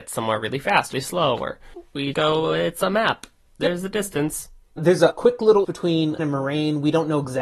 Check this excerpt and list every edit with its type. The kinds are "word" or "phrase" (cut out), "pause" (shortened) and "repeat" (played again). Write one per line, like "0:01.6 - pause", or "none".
0:00.9 - word
0:02.1 - word
0:04.8 - word
0:05.1 - word
0:05.6 - word
0:06.2 - word